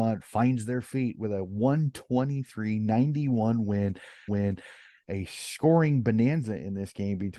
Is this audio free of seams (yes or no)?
no